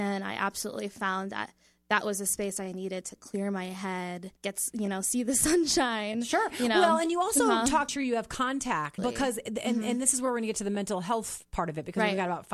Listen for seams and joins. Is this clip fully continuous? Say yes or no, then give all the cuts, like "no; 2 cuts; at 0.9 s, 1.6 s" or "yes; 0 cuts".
no; 3 cuts; at 4.4 s, 7.9 s, 9.0 s